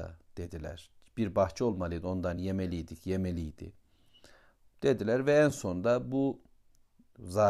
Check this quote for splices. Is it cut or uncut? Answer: uncut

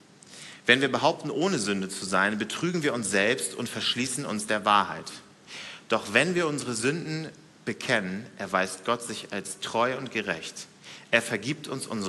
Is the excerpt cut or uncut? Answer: uncut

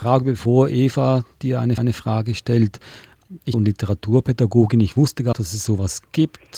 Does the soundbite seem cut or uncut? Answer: cut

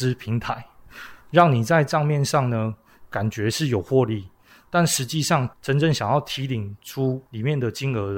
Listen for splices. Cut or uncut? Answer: cut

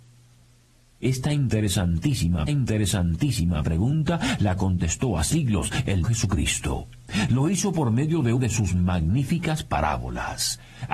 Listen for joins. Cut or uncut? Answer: cut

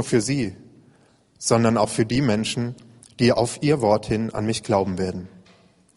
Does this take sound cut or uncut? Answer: uncut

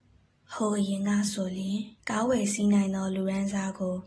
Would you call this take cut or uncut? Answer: cut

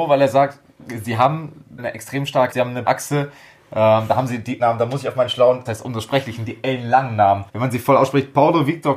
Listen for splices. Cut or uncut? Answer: cut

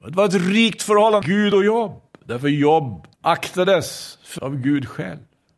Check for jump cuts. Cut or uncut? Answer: cut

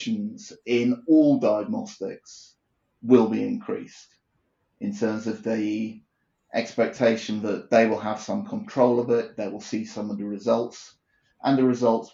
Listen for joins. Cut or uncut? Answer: uncut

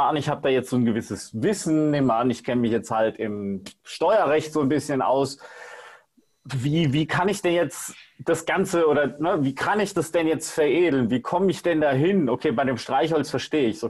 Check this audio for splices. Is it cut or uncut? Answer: uncut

